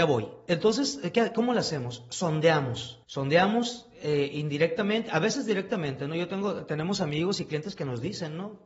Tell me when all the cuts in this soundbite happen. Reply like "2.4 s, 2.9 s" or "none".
3.0 s